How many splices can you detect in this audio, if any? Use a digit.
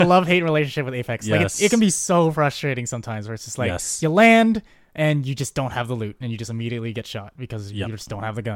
0